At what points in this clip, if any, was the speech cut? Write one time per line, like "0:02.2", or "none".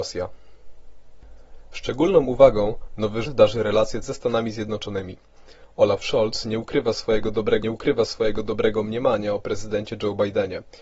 0:03.2
0:04.0
0:07.6